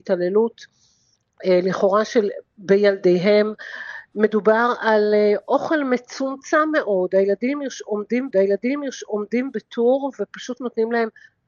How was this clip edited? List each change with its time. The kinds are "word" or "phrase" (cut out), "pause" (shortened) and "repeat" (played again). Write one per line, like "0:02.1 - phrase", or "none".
0:08.3 - repeat